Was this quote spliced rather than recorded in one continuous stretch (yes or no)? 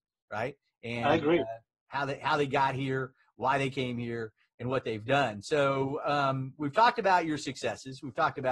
no